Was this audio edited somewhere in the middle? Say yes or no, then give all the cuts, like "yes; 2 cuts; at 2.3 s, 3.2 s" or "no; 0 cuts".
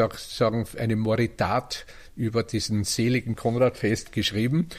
yes; 1 cut; at 3.4 s